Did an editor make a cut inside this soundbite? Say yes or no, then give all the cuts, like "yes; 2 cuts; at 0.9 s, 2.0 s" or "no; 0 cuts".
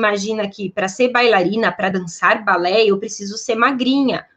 no; 0 cuts